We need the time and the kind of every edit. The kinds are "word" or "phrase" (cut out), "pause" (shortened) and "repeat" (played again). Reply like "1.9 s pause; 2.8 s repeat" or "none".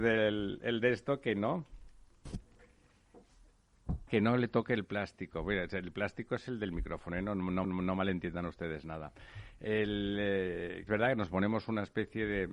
4.1 s word; 7.6 s repeat; 10.9 s phrase